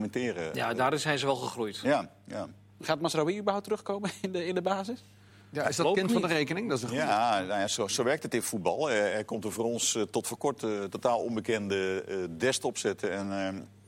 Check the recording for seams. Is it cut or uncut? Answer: uncut